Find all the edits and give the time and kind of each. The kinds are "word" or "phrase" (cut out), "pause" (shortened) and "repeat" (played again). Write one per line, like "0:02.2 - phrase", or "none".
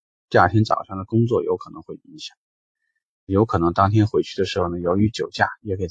0:03.3 - word